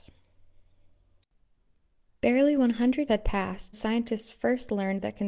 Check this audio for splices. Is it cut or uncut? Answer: cut